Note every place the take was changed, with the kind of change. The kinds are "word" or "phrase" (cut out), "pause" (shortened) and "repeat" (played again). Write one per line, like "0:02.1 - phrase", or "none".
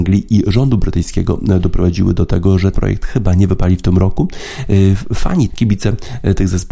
0:02.7 - word
0:05.5 - word